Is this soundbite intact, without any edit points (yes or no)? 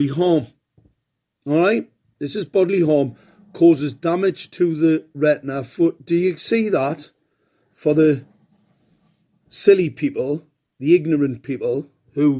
yes